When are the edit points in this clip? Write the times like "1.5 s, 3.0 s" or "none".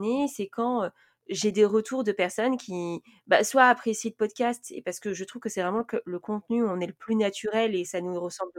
none